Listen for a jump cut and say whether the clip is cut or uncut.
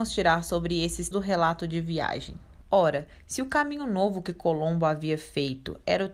cut